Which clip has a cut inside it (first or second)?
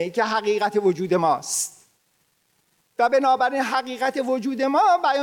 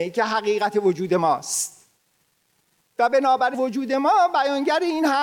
second